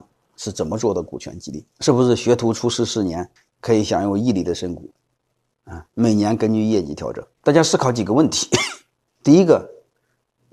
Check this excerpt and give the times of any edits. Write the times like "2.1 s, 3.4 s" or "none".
1.7 s, 3.4 s, 5.9 s, 7.3 s

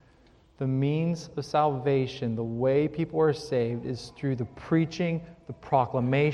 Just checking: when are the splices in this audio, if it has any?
none

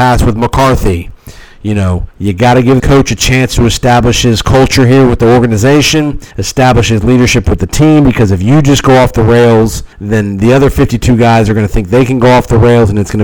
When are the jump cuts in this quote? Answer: 2.1 s, 2.8 s, 6.3 s, 9.9 s

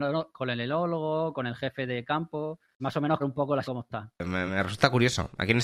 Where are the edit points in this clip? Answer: 2.8 s, 3.2 s, 3.6 s, 4.5 s

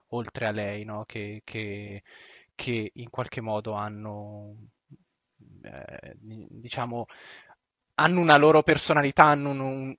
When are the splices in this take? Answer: none

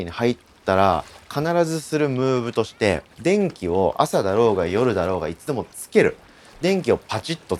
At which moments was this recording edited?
3.1 s

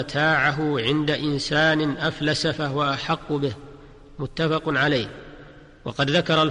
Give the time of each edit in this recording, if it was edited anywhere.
none

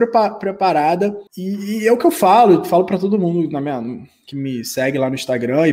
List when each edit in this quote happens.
1.3 s

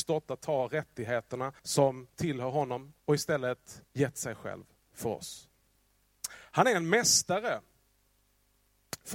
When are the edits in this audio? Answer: 1.6 s, 3.0 s, 3.9 s

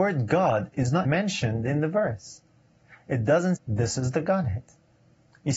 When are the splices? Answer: 1.0 s, 3.6 s

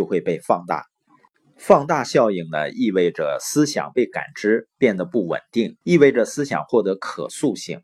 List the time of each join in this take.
5.8 s

